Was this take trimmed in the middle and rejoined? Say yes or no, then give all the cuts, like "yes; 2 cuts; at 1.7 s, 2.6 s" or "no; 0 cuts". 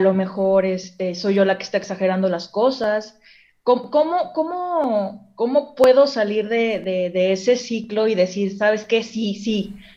no; 0 cuts